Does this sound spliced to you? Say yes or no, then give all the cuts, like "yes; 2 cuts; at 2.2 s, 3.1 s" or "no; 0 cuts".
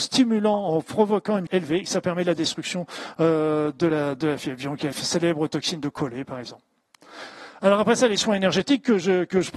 yes; 2 cuts; at 1.5 s, 4.9 s